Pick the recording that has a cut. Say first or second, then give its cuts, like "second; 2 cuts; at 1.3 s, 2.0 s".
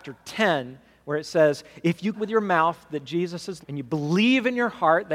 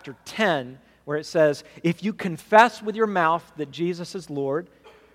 first; 2 cuts; at 2.1 s, 3.6 s